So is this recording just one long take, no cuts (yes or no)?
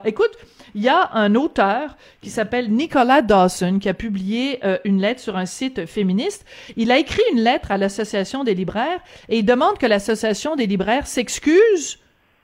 yes